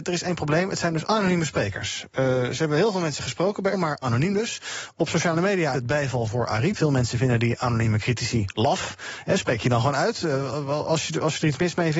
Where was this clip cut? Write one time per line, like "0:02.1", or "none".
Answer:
0:01.0
0:03.7
0:04.0
0:05.7
0:06.7

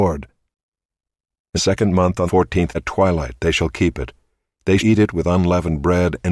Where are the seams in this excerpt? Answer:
0:01.6
0:02.3
0:02.7
0:04.8

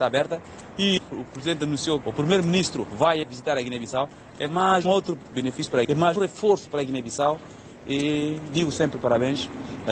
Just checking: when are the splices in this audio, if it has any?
0:01.0
0:02.0
0:03.2
0:04.8
0:05.8
0:06.2

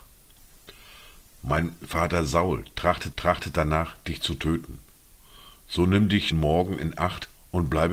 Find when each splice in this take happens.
0:03.1
0:06.3

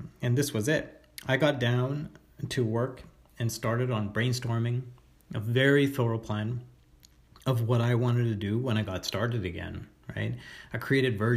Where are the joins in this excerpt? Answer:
none

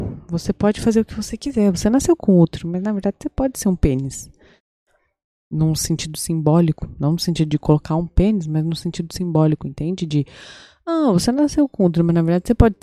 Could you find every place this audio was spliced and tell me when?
none

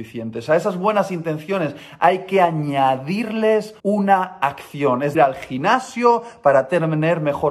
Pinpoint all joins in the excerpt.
0:03.8
0:05.1

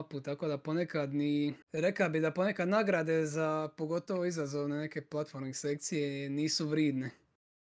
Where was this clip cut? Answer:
0:01.6

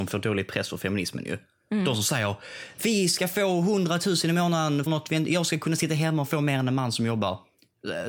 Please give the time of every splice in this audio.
0:04.9

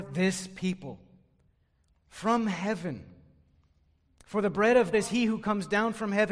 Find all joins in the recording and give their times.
0:04.9

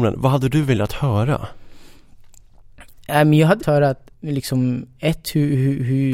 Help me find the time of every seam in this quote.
0:03.6
0:04.1

